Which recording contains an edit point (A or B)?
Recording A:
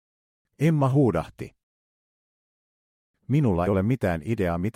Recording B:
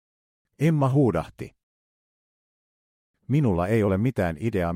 A